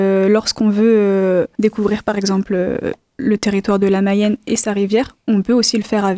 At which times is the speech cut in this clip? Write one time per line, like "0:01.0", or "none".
0:01.5